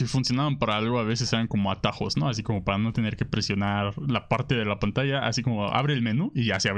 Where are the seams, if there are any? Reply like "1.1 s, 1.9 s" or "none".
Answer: none